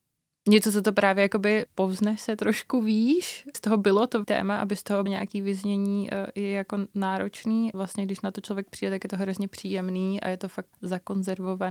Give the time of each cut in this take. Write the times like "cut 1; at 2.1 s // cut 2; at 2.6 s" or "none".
cut 1; at 1.7 s // cut 2; at 3.5 s // cut 3; at 4.2 s // cut 4; at 5.1 s // cut 5; at 7.7 s // cut 6; at 10.7 s